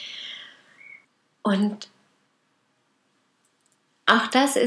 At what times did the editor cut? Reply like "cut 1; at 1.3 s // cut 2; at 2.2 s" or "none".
cut 1; at 1.0 s